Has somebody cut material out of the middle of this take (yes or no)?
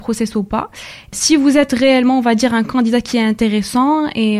no